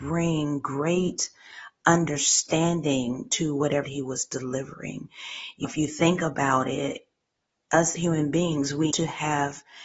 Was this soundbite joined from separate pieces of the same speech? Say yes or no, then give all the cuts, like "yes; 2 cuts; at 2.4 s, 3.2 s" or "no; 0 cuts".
yes; 4 cuts; at 3.8 s, 5.6 s, 8.0 s, 8.9 s